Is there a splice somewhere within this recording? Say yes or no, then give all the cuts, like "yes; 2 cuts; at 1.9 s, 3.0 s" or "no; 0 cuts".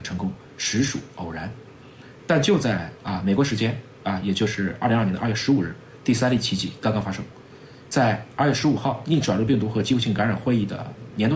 no; 0 cuts